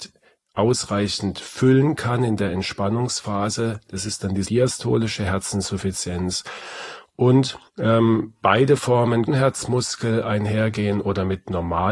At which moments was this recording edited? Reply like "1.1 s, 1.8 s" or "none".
4.4 s, 7.7 s, 9.3 s